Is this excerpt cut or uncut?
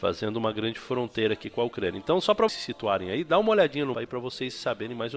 cut